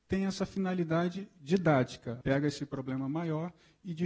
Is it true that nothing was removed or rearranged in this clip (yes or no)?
no